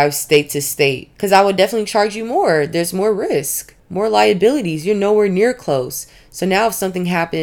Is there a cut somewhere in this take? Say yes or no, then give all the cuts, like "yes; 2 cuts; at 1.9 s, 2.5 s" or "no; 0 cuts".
no; 0 cuts